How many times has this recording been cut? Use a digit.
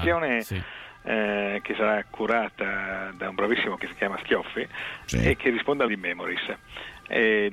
3